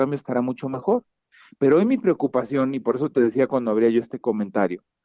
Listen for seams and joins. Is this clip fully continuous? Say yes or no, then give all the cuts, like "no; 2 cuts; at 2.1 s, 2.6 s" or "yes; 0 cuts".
yes; 0 cuts